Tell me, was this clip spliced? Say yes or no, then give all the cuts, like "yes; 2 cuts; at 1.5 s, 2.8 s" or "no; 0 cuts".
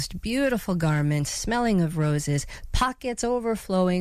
no; 0 cuts